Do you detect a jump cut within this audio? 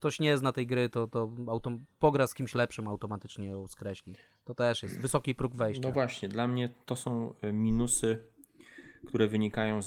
no; 0 cuts

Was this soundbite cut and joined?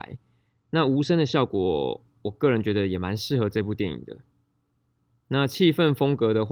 no; 0 cuts

